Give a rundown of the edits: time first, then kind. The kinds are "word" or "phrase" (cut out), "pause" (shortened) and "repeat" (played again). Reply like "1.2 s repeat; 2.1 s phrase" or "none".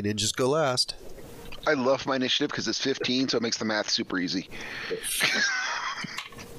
none